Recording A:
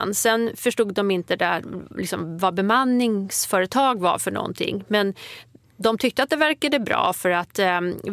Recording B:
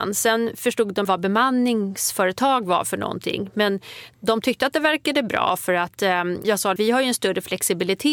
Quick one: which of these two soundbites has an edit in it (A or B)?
B